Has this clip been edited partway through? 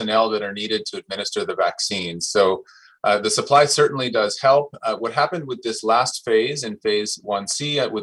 no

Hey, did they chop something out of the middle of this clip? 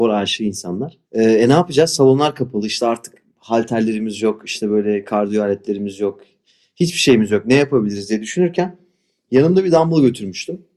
yes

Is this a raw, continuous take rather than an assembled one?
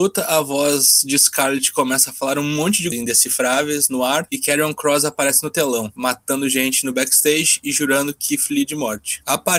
no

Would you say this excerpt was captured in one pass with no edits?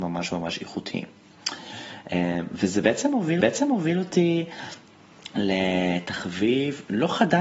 no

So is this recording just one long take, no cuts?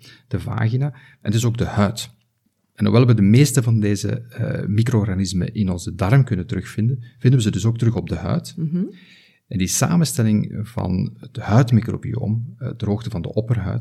yes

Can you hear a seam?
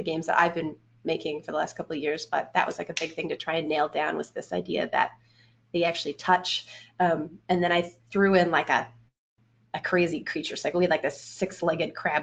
no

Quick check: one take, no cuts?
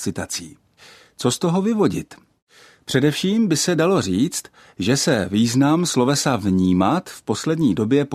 yes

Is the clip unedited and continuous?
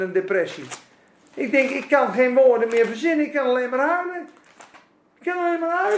yes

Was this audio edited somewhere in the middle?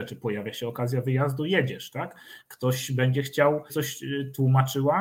yes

